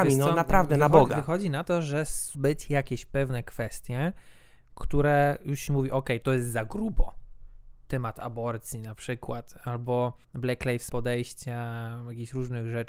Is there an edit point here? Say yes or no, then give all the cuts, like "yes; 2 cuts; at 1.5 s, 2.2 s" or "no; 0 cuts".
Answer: yes; 3 cuts; at 2.3 s, 10.2 s, 10.9 s